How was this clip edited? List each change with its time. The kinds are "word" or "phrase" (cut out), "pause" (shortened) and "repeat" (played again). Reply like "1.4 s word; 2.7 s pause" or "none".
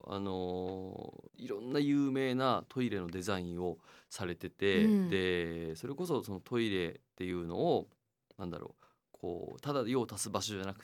none